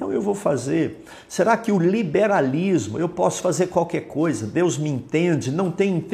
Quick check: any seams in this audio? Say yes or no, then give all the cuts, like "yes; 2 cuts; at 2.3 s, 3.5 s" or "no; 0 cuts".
no; 0 cuts